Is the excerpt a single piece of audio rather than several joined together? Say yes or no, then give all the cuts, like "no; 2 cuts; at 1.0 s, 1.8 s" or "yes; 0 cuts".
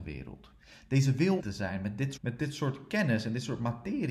no; 2 cuts; at 1.4 s, 2.2 s